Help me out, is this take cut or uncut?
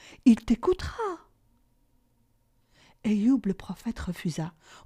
uncut